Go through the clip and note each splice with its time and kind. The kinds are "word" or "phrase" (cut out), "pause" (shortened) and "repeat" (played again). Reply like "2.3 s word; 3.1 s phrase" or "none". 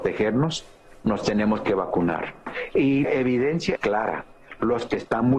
3.0 s word; 3.8 s word